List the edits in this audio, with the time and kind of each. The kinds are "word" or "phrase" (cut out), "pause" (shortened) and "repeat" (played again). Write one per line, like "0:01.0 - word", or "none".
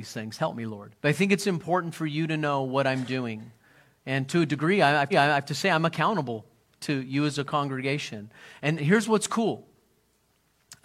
0:01.0 - pause
0:05.1 - repeat
0:08.8 - word